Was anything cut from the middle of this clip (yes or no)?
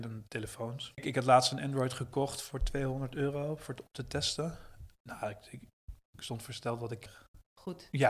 no